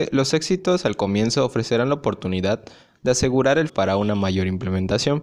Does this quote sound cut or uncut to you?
cut